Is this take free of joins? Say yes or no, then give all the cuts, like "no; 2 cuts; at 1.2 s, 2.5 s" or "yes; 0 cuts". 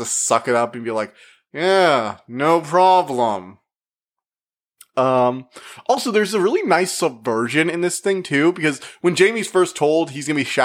yes; 0 cuts